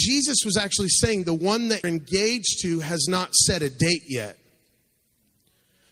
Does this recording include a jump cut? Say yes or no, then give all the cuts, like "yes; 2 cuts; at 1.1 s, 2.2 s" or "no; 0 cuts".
yes; 1 cut; at 1.8 s